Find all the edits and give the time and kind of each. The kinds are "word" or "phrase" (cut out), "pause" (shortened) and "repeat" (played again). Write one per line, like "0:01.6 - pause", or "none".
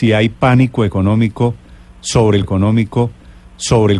0:02.4 - repeat